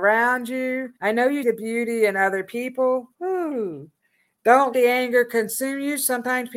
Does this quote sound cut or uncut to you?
cut